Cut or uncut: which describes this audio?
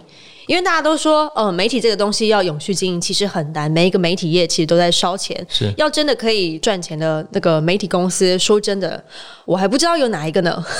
uncut